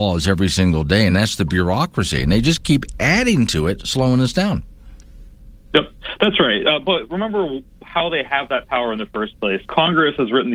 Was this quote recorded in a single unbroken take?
yes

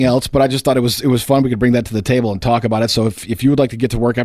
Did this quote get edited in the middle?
no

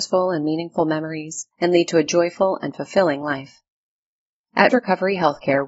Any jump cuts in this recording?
yes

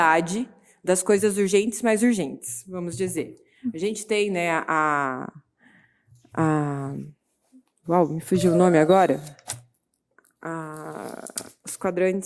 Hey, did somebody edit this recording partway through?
no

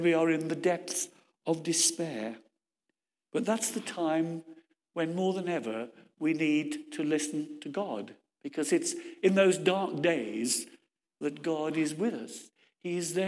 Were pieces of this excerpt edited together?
no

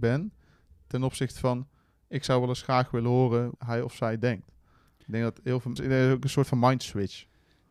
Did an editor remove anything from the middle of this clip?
yes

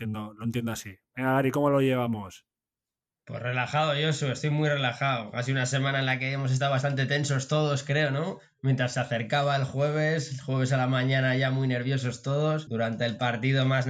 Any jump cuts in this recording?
no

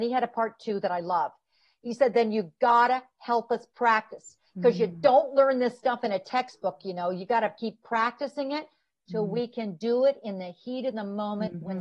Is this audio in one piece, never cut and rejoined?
yes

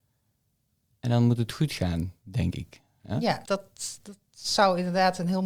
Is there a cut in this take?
yes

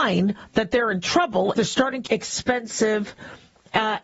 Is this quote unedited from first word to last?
no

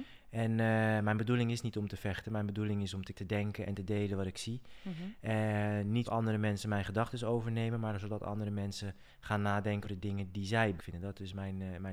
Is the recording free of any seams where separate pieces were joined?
no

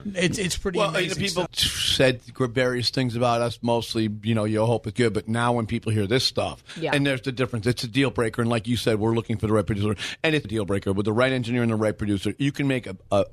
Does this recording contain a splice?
yes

